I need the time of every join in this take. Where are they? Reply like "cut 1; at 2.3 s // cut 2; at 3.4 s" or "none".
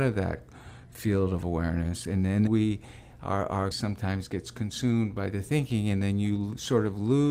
cut 1; at 2.5 s // cut 2; at 3.7 s